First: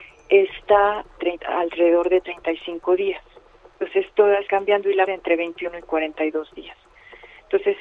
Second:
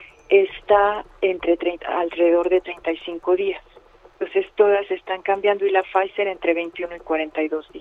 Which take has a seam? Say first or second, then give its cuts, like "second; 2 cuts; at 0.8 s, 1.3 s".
first; 3 cuts; at 1.2 s, 4.5 s, 5.1 s